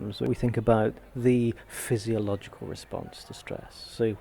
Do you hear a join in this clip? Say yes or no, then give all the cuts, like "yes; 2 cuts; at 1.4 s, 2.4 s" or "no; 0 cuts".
no; 0 cuts